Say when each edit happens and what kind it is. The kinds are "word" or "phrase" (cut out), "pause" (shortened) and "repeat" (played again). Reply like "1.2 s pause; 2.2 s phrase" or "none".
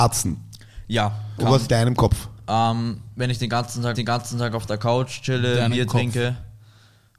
1.4 s word; 1.7 s phrase; 3.9 s repeat

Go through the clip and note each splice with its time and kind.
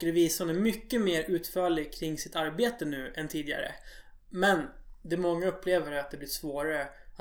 none

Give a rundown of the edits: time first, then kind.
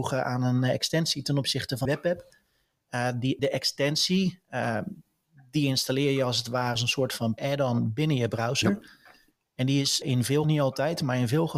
1.8 s word; 3.4 s word; 6.8 s word; 7.4 s word; 10.0 s word; 10.4 s word

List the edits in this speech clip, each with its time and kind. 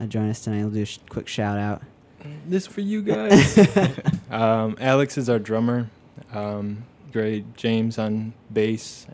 2.7 s word; 7.1 s word

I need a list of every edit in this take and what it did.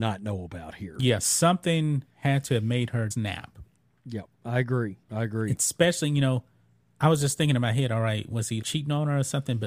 2.1 s pause; 3.1 s word; 5.0 s pause; 6.6 s pause; 8.6 s word

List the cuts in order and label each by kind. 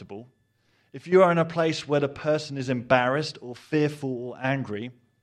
none

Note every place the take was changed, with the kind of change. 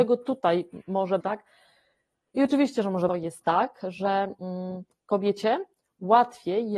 1.2 s word; 3.1 s phrase

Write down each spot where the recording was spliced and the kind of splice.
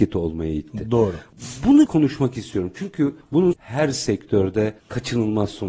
1.9 s word; 3.5 s phrase

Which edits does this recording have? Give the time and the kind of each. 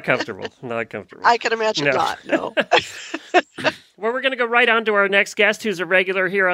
none

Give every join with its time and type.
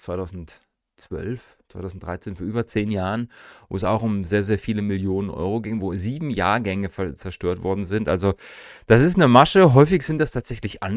none

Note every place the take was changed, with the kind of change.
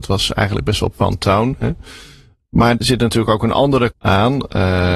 0.9 s word; 2.8 s word; 3.9 s word

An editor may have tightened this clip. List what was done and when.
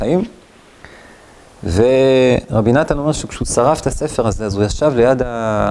none

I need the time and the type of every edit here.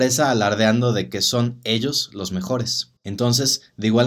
3.0 s pause

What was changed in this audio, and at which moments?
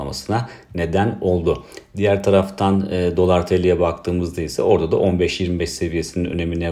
none

